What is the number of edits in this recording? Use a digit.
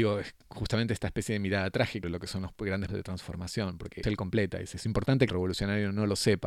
4